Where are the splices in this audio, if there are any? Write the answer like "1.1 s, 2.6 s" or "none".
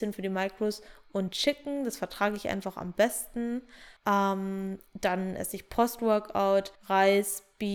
4.0 s, 6.7 s